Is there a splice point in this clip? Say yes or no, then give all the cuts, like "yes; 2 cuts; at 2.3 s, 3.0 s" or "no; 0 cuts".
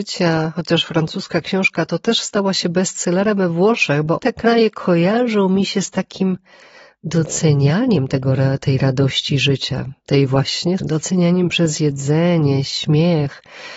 yes; 2 cuts; at 4.2 s, 10.8 s